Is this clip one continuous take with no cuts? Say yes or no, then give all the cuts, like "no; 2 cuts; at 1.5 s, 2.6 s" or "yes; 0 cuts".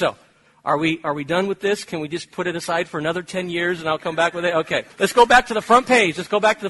no; 1 cut; at 4.9 s